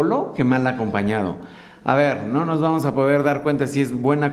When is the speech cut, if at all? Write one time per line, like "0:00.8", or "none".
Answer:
none